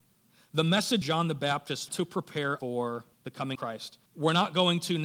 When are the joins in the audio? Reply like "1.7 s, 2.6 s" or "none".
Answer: 1.0 s, 1.9 s, 2.6 s, 3.1 s, 3.5 s, 4.1 s